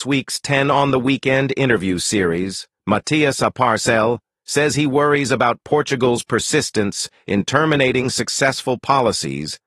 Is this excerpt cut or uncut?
uncut